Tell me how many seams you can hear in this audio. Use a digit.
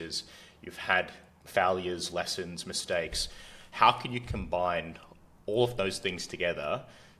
0